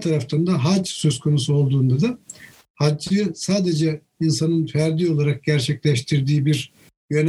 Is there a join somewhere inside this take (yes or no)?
no